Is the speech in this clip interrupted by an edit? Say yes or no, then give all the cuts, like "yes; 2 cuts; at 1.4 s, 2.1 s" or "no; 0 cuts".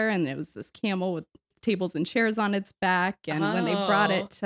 no; 0 cuts